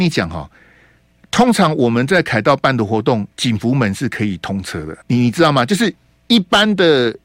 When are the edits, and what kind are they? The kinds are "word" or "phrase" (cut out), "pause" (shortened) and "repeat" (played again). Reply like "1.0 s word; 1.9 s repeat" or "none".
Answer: 3.3 s pause; 5.0 s pause

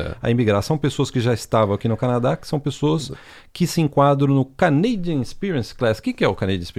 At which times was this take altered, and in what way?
none

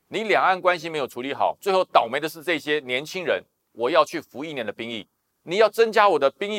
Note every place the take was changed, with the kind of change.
none

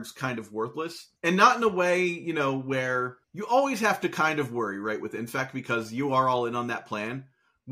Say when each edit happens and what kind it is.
1.2 s pause; 3.2 s pause

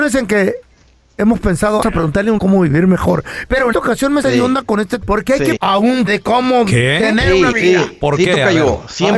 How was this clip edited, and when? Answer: 1.8 s word; 2.4 s word; 3.7 s word; 4.2 s word; 5.0 s word; 5.6 s word; 6.1 s word; 7.5 s word

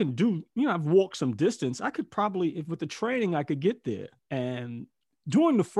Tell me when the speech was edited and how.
4.2 s pause

